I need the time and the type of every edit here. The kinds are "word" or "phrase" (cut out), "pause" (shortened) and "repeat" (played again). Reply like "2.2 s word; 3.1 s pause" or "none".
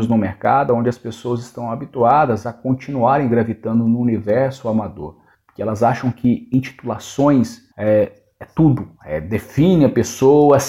5.3 s pause; 7.7 s pause; 9.0 s pause